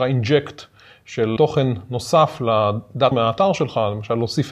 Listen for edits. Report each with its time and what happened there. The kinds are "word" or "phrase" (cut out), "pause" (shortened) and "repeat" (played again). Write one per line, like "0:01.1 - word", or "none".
0:01.4 - word
0:03.1 - word